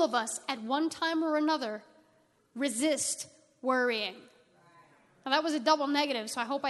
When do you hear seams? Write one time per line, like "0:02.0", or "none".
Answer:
0:02.4